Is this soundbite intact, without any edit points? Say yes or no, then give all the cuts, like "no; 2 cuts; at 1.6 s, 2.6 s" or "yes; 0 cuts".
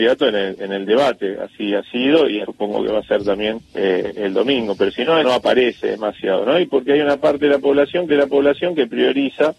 no; 4 cuts; at 2.4 s, 3.7 s, 5.2 s, 8.1 s